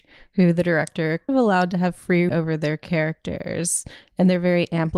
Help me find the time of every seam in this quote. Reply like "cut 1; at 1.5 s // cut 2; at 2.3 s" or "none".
cut 1; at 1.3 s // cut 2; at 2.3 s

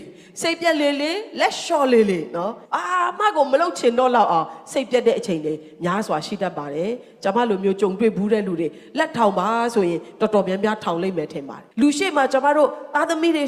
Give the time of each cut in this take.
cut 1; at 2.7 s // cut 2; at 11.7 s

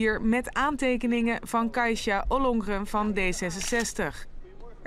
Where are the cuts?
none

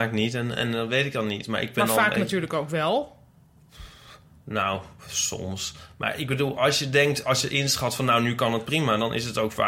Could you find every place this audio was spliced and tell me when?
none

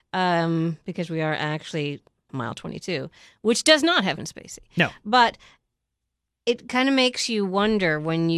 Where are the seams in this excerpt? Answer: cut 1; at 2.3 s // cut 2; at 4.2 s

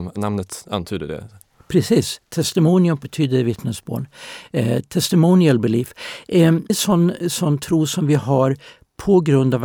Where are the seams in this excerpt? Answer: cut 1; at 3.0 s // cut 2; at 6.7 s // cut 3; at 7.2 s

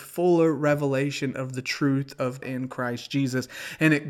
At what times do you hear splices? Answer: cut 1; at 2.4 s

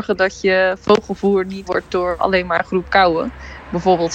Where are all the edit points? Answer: cut 1; at 1.6 s // cut 2; at 2.2 s // cut 3; at 2.6 s

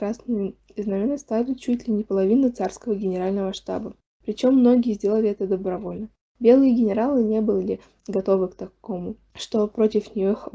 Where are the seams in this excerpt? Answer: none

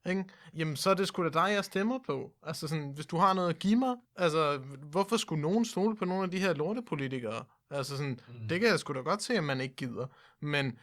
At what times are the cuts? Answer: cut 1; at 4.0 s

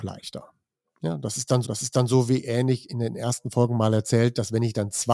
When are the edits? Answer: cut 1; at 1.6 s

